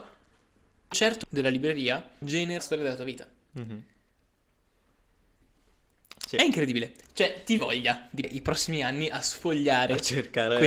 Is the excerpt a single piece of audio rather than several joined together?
no; 6 cuts; at 0.9 s, 1.2 s, 2.2 s, 2.6 s, 7.6 s, 8.2 s

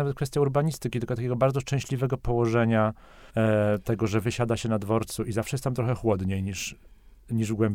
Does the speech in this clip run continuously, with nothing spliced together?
no; 1 cut; at 3.3 s

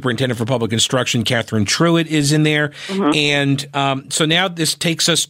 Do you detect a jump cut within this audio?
no; 0 cuts

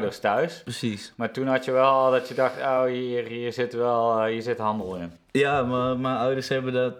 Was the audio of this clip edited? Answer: no; 0 cuts

